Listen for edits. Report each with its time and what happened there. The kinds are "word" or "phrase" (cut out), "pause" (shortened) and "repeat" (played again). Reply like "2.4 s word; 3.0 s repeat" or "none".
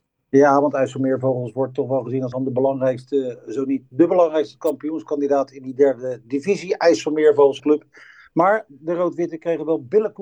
2.3 s word; 7.6 s word